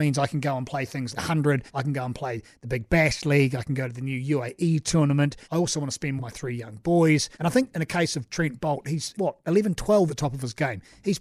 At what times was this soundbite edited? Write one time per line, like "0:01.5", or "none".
0:01.1
0:01.7
0:05.4
0:06.2
0:07.3
0:09.1
0:10.1